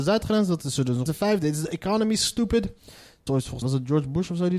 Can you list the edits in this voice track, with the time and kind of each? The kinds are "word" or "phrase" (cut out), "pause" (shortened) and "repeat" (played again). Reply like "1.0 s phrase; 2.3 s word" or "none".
1.1 s word; 3.3 s word; 3.6 s word